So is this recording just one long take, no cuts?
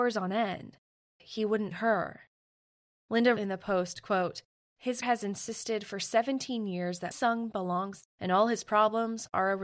no; 6 cuts; at 1.2 s, 1.7 s, 3.4 s, 5.0 s, 7.1 s, 8.0 s

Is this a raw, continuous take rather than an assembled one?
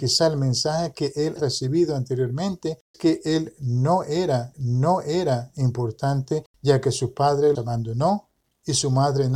no; 4 cuts; at 1.4 s, 2.9 s, 4.5 s, 7.5 s

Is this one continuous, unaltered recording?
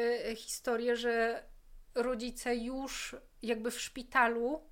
yes; 0 cuts

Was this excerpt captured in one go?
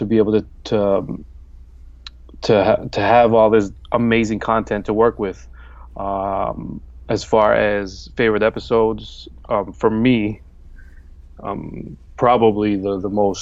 yes; 0 cuts

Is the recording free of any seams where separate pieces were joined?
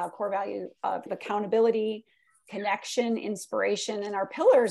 no; 1 cut; at 1.1 s

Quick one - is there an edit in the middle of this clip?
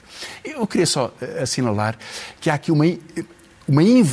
no; 0 cuts

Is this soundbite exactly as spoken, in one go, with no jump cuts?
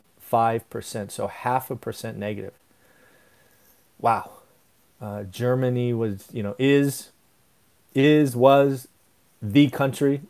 yes; 0 cuts

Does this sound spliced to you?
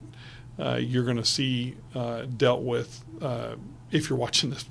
no; 0 cuts

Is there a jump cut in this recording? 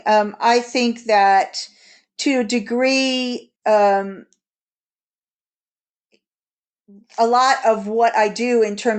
yes; 1 cut; at 3.6 s

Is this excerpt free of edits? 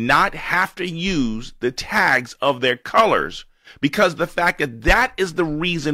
yes; 0 cuts

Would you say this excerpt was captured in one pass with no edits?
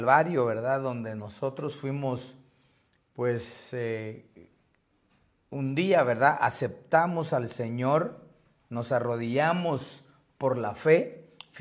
yes; 0 cuts

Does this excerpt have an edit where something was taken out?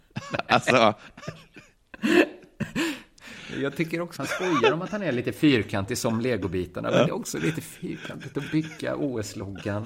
yes; 2 cuts; at 4.2 s, 7.1 s

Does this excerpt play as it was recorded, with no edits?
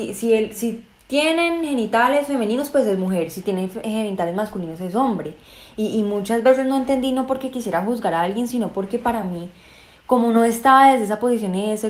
yes; 0 cuts

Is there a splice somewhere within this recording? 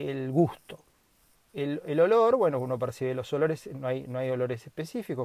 no; 0 cuts

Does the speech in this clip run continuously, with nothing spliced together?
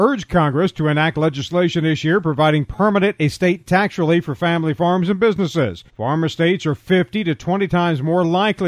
no; 1 cut; at 5.9 s

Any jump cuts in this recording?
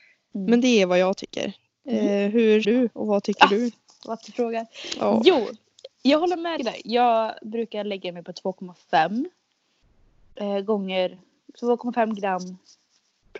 yes; 4 cuts; at 1.7 s, 2.6 s, 4.2 s, 6.6 s

